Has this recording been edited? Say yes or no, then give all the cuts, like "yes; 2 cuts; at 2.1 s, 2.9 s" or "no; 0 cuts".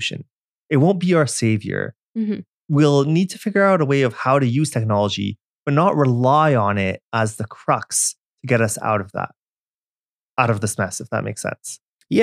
no; 0 cuts